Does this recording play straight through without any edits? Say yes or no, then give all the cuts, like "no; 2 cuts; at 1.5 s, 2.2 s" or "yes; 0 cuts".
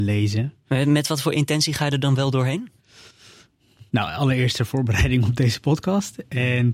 no; 1 cut; at 3.9 s